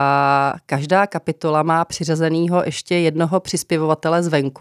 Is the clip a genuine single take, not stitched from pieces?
yes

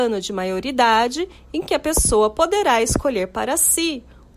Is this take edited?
no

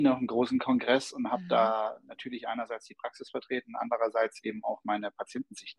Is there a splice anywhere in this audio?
no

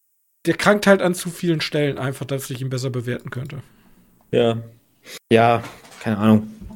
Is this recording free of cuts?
no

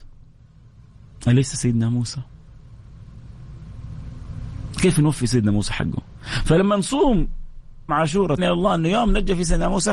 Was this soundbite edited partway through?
yes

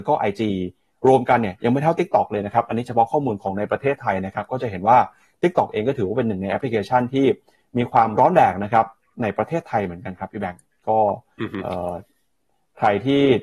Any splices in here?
no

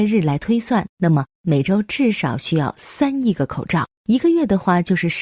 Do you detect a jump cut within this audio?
yes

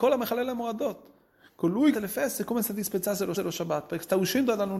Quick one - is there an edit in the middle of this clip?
yes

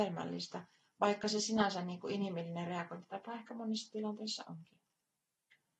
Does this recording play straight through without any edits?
yes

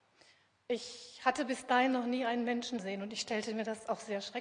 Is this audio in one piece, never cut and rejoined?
no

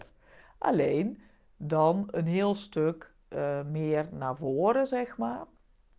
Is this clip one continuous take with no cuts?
yes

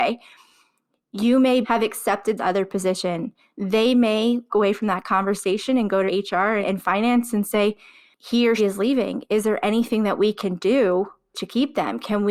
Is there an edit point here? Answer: yes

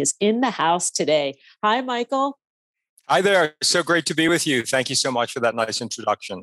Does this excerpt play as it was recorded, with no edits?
yes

